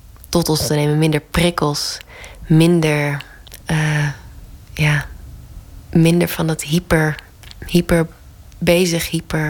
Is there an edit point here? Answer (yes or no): yes